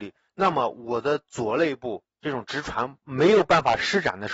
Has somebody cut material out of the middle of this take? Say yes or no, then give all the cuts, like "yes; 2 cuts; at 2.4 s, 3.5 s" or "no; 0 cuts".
yes; 1 cut; at 2.1 s